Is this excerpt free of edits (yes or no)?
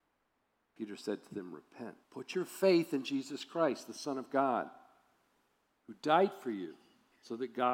no